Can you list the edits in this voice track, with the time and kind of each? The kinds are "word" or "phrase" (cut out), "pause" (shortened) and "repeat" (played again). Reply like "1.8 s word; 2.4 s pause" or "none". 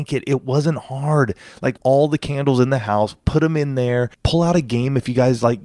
1.8 s word; 4.1 s pause